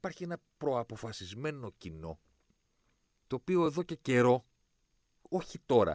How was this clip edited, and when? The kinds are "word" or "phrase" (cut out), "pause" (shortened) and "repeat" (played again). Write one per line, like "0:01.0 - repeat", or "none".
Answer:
none